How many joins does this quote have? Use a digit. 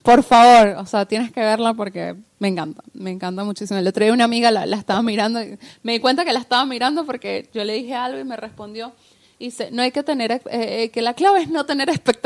0